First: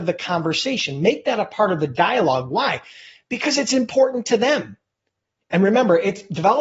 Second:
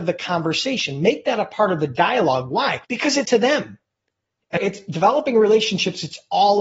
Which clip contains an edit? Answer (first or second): second